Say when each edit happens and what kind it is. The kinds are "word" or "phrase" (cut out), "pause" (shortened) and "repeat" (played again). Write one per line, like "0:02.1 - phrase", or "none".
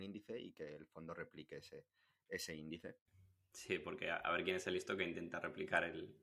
0:03.1 - pause

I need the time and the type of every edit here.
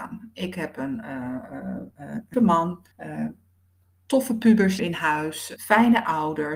0:02.3 - word
0:02.9 - pause
0:04.8 - word
0:05.6 - word

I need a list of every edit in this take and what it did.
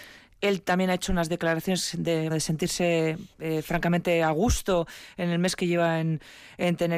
0:02.3 - word
0:03.3 - pause

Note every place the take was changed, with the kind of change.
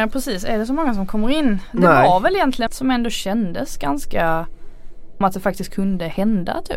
0:02.7 - word
0:05.2 - word

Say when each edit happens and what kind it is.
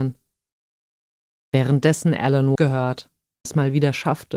0:02.6 - word
0:03.5 - word

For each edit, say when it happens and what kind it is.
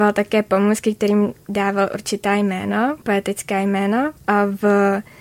none

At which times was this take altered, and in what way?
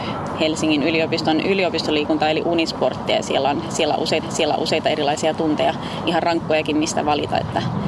0:04.2 - repeat

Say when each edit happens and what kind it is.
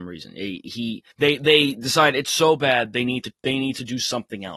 0:01.1 - pause

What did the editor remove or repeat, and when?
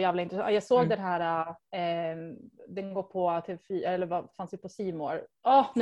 none

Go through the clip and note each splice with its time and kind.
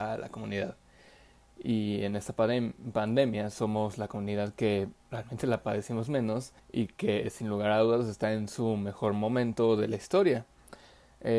0:06.6 - pause

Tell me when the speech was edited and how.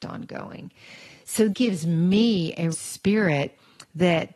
0:01.5 - word
0:02.7 - word

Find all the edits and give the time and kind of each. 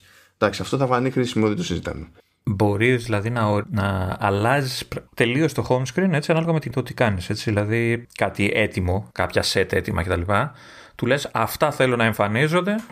0:02.2 - pause
0:03.6 - word
0:05.1 - pause
0:06.7 - phrase
0:08.0 - phrase
0:09.1 - pause

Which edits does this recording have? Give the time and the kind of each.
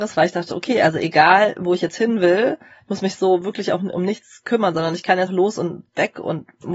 0:05.3 - word

